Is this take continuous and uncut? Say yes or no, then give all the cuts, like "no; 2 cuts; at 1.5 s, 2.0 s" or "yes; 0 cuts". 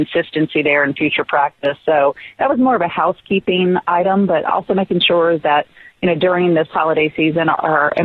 yes; 0 cuts